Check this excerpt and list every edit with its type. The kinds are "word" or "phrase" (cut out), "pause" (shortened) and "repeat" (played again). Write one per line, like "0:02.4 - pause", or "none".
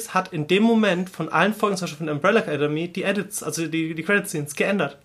none